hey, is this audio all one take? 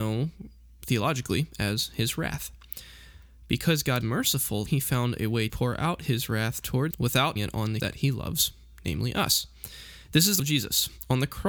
no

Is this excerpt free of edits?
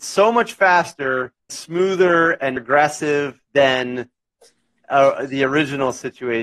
no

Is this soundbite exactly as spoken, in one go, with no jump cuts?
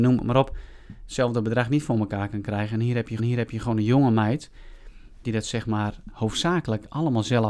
no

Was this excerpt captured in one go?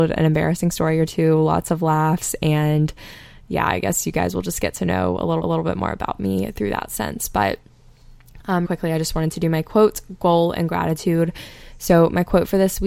no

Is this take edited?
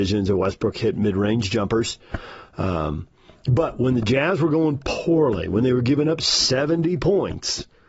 no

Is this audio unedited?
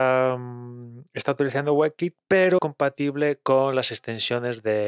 no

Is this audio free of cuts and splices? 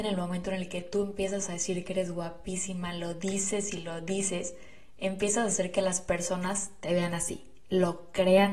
yes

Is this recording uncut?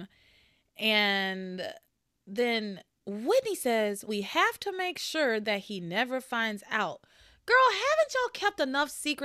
no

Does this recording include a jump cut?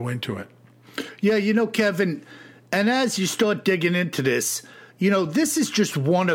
no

